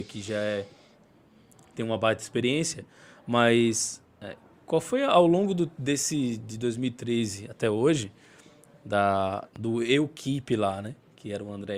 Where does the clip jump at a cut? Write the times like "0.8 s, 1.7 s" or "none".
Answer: 9.5 s

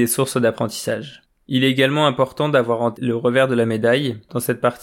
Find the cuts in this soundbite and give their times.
2.9 s

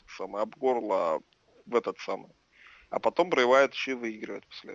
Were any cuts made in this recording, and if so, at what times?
none

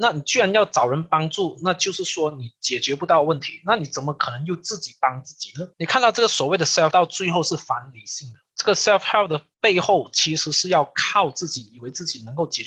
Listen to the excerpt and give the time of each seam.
5.7 s, 6.9 s, 8.5 s, 9.5 s

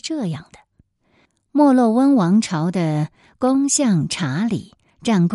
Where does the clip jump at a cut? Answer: none

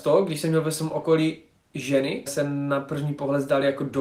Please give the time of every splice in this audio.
2.3 s

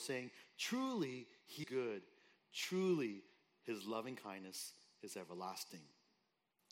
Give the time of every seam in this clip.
1.6 s

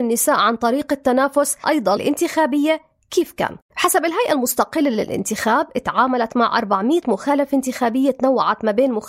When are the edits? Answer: 1.6 s, 2.0 s, 3.6 s

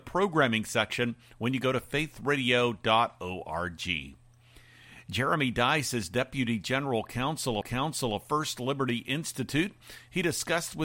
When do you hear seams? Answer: 7.6 s

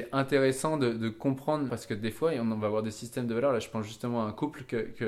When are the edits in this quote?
1.7 s

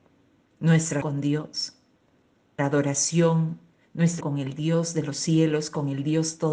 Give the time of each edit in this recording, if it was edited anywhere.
1.0 s, 2.6 s, 4.2 s

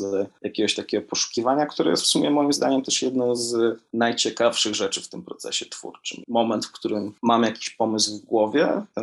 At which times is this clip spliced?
none

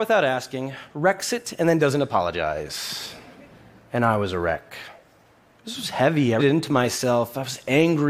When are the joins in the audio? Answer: 6.4 s

